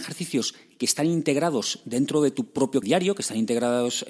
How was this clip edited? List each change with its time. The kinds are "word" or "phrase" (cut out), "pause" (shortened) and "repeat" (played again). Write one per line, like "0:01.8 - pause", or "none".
0:02.8 - word